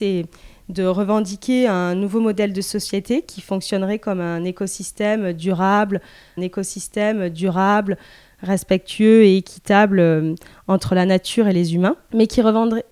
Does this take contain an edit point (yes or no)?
yes